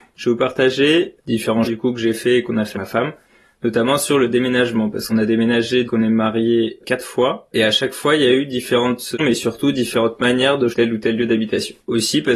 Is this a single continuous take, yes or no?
no